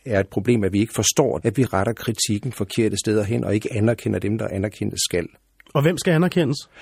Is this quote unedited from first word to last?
no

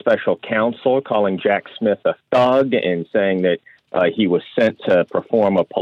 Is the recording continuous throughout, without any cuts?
yes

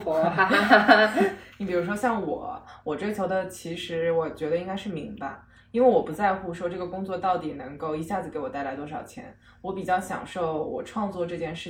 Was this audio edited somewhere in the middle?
no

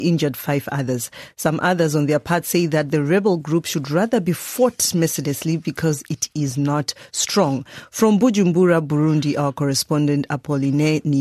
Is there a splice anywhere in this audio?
no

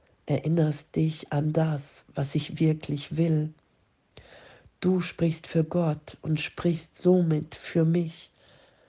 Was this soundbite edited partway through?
no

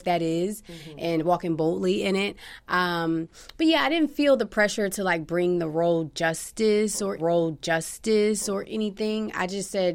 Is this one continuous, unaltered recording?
no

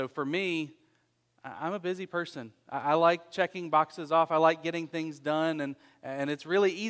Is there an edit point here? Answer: no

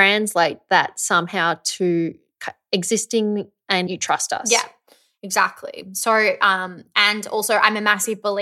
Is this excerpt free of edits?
no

